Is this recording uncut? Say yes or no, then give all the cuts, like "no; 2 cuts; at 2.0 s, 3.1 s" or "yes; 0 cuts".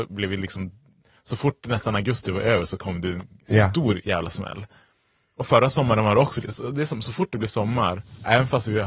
yes; 0 cuts